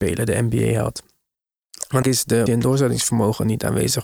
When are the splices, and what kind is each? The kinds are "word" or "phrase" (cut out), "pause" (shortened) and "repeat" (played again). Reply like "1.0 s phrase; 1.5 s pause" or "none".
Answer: 2.0 s phrase; 2.5 s word